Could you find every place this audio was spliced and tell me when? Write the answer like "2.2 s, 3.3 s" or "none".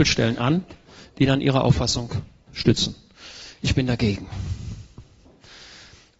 2.5 s